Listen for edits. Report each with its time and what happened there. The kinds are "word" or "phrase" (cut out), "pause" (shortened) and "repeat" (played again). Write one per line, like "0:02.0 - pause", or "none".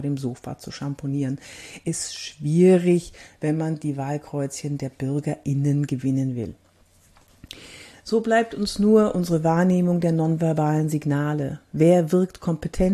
none